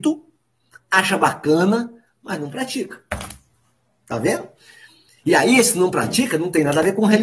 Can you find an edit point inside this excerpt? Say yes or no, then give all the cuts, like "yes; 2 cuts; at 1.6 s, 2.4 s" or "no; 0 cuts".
no; 0 cuts